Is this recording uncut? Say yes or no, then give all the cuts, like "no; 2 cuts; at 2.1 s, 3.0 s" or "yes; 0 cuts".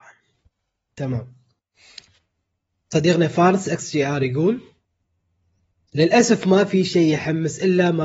yes; 0 cuts